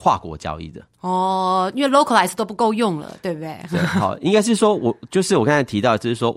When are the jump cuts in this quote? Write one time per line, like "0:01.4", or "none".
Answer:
none